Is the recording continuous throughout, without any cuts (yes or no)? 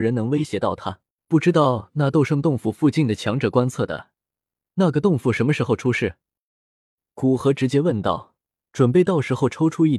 no